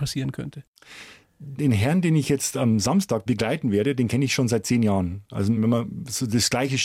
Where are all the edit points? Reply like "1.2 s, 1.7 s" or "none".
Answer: none